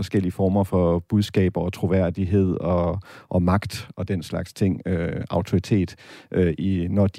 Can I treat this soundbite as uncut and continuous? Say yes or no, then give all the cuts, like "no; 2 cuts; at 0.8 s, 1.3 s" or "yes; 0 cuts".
yes; 0 cuts